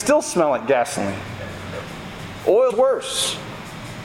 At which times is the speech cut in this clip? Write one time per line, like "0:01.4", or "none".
0:02.7